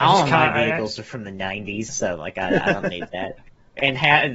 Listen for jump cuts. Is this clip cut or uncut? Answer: cut